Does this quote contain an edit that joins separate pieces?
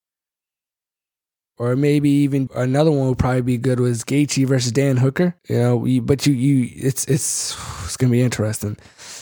yes; 2 cuts; at 2.5 s, 5.4 s

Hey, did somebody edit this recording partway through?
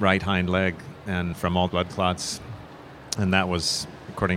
yes; 2 cuts; at 1.3 s, 1.7 s

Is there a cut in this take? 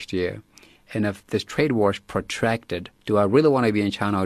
yes; 1 cut; at 3.0 s

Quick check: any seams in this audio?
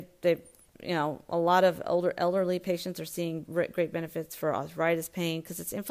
no; 0 cuts

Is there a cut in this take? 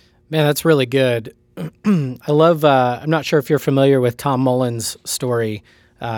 no; 0 cuts

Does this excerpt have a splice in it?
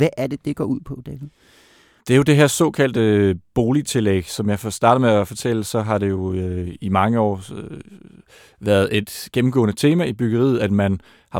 no; 0 cuts

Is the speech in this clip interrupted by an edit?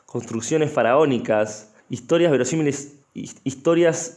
yes; 2 cuts; at 1.8 s, 3.0 s

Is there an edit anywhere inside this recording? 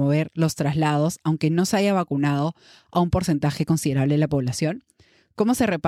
no; 0 cuts

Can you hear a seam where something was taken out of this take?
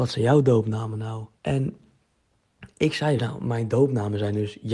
yes; 2 cuts; at 1.4 s, 3.2 s

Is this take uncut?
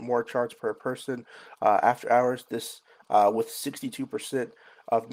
yes; 0 cuts

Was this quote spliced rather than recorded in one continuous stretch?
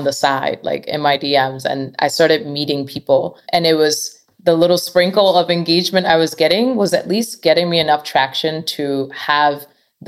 yes; 1 cut; at 3.4 s

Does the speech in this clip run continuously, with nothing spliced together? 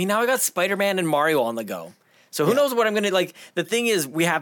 yes; 0 cuts

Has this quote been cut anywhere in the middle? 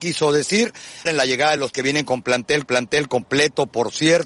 yes; 3 cuts; at 1.1 s, 1.7 s, 2.7 s

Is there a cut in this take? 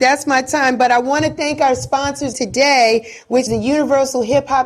yes; 2 cuts; at 2.3 s, 3.5 s

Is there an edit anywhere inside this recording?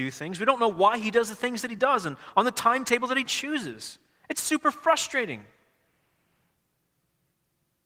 no; 0 cuts

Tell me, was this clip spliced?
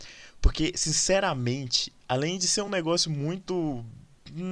no; 0 cuts

